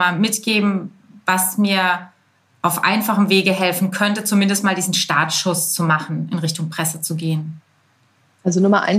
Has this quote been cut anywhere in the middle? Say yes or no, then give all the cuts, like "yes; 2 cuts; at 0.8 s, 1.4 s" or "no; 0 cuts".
no; 0 cuts